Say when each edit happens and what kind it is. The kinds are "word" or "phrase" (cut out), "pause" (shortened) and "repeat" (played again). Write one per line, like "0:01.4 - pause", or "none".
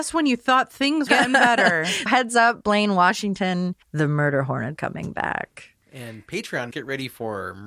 0:01.1 - phrase
0:02.1 - word
0:03.8 - pause
0:04.8 - word
0:06.7 - word